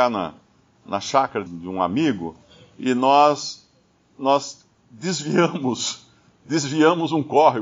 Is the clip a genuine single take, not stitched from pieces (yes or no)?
no